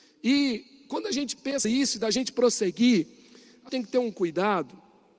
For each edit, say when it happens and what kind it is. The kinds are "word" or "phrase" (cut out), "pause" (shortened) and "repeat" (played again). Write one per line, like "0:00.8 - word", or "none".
0:01.6 - word
0:03.7 - word